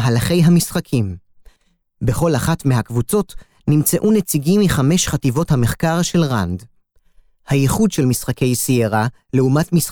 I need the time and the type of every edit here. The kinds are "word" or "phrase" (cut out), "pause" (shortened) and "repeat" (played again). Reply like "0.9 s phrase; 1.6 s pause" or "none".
none